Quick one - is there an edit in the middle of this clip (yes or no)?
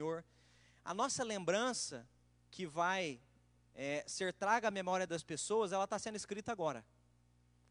no